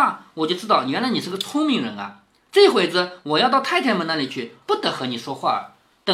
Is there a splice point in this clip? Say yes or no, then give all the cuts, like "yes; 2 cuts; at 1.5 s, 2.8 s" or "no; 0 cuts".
no; 0 cuts